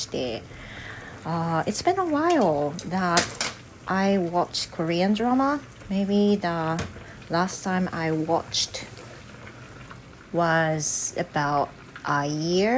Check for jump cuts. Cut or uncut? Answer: uncut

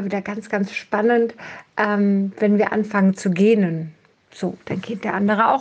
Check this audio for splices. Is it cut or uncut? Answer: uncut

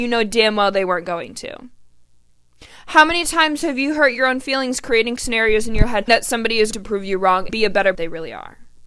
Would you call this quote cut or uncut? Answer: cut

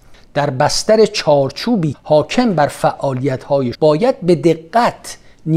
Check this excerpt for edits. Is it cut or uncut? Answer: cut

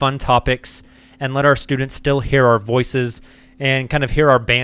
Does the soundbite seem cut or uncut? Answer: uncut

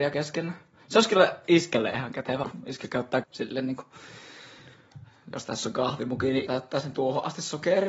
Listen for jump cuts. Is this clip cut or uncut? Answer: cut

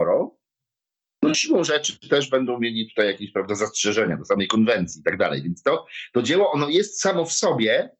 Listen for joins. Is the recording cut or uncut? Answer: uncut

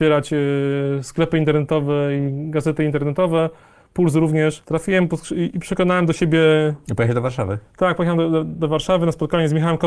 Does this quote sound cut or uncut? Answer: uncut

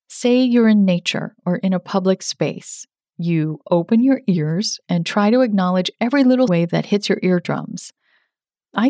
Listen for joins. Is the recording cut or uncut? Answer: cut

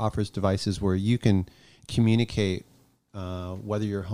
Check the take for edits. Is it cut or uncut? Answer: uncut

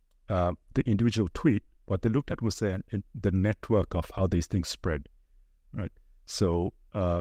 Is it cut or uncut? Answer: uncut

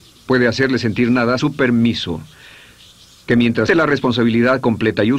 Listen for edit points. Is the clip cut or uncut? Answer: cut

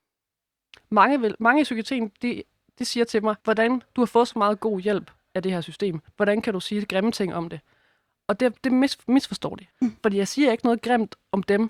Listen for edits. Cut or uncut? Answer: cut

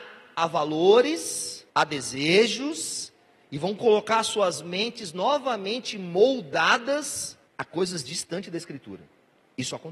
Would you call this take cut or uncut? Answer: cut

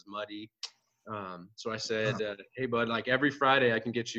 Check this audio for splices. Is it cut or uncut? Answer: uncut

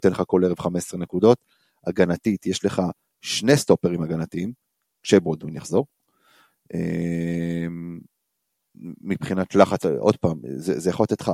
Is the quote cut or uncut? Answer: uncut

